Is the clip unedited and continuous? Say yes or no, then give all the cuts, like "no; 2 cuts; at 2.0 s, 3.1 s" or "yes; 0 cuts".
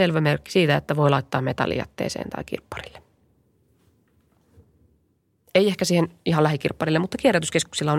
yes; 0 cuts